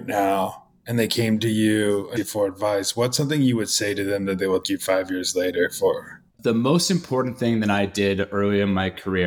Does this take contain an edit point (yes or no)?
yes